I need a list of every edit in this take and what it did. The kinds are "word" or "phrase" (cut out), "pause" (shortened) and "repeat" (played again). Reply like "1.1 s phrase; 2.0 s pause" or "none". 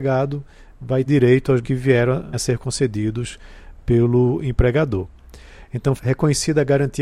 1.1 s word; 1.6 s word; 2.3 s word; 6.0 s word